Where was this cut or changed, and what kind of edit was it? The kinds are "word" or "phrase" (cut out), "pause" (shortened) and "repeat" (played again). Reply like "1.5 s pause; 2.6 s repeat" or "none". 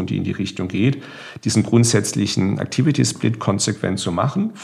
none

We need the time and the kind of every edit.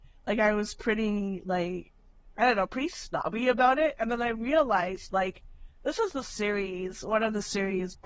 none

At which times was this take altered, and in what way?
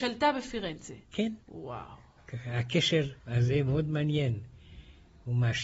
1.4 s pause; 3.2 s pause

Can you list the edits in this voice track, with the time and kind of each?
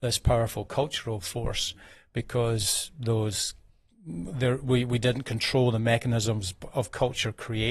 none

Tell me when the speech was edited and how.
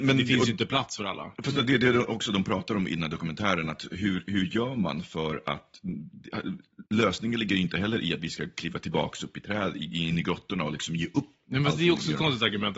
6.9 s pause; 11.4 s pause

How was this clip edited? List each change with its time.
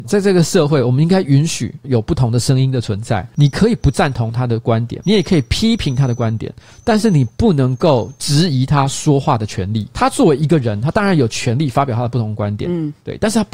5.0 s word

